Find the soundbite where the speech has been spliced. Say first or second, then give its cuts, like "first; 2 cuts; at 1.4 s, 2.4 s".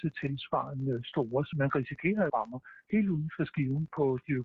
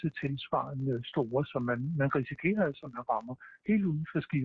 first; 2 cuts; at 1.5 s, 2.3 s